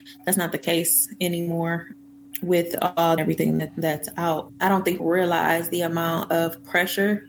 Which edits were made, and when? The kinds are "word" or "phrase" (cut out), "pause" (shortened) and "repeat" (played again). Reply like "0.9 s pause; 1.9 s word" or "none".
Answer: 3.2 s phrase; 3.7 s word; 5.0 s word